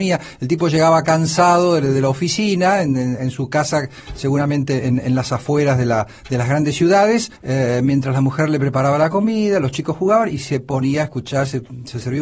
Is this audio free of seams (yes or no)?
no